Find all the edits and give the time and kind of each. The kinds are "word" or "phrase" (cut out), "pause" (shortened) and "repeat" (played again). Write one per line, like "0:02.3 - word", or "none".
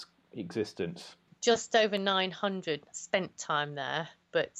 0:02.8 - word